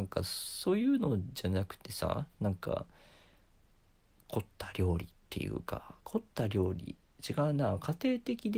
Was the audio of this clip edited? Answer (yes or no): no